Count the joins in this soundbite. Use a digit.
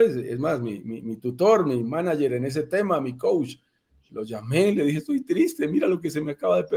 0